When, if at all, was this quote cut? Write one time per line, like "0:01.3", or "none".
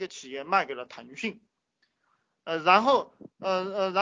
none